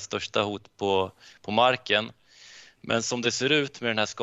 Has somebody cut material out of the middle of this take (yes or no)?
no